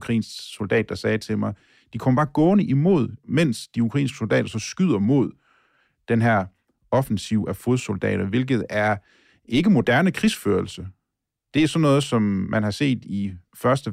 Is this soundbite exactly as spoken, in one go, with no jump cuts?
yes; 0 cuts

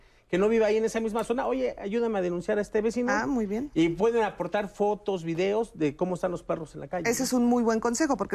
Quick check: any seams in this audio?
no; 0 cuts

